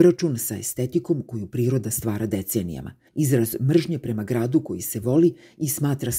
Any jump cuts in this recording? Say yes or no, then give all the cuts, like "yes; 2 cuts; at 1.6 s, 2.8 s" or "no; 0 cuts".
yes; 1 cut; at 3.1 s